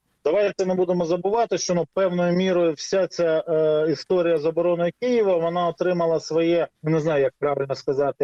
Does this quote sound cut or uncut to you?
cut